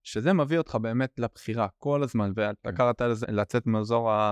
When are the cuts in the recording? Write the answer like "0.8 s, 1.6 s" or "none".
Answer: 3.2 s